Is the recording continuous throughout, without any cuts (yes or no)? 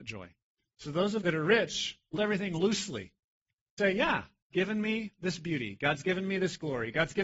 no